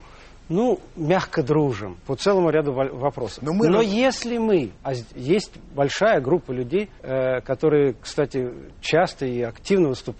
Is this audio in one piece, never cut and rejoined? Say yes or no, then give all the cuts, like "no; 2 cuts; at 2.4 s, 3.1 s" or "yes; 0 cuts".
no; 3 cuts; at 2.0 s, 4.8 s, 7.0 s